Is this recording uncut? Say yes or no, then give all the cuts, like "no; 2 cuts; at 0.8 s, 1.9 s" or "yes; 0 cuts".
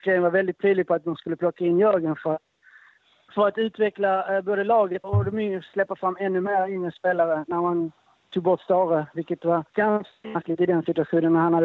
no; 2 cuts; at 5.0 s, 9.7 s